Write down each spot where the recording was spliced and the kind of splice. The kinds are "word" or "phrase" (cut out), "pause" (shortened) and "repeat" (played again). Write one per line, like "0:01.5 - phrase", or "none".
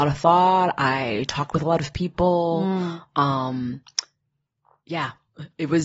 none